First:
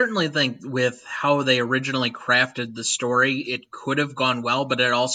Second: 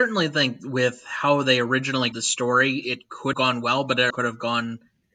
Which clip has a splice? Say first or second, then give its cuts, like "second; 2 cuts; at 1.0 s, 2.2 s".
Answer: second; 3 cuts; at 2.1 s, 3.3 s, 4.1 s